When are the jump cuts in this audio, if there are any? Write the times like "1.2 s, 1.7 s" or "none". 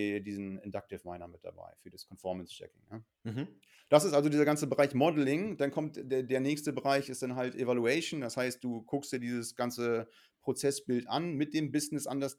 3.1 s